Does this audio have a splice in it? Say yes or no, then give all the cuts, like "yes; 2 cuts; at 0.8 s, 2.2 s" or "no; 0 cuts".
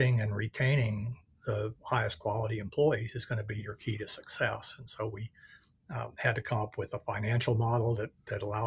no; 0 cuts